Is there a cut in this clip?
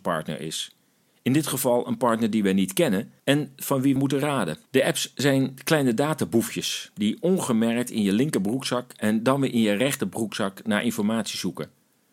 yes; 3 cuts; at 3.2 s, 4.0 s, 4.7 s

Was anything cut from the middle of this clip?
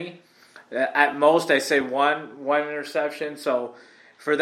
no; 0 cuts

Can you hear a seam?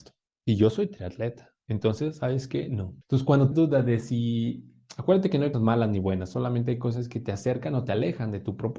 yes; 4 cuts; at 1.6 s, 3.0 s, 3.5 s, 5.5 s

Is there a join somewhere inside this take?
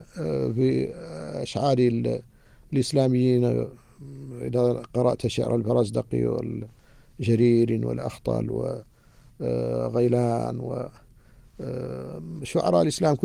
no; 0 cuts

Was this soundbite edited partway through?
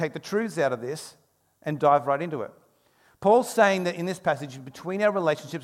no; 0 cuts

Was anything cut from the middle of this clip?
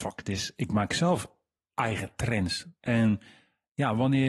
no; 0 cuts

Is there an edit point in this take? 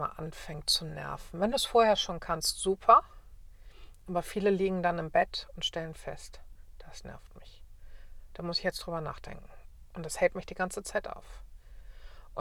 no; 0 cuts

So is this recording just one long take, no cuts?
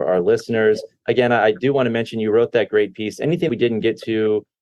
no; 1 cut; at 3.5 s

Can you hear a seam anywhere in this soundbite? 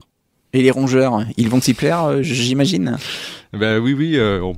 no; 0 cuts

